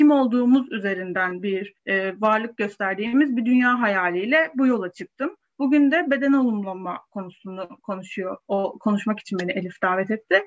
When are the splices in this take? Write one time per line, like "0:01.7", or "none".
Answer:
0:01.8